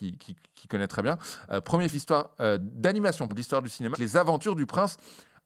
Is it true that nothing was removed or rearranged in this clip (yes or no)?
no